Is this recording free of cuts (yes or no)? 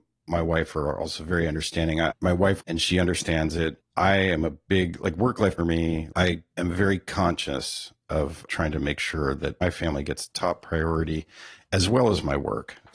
no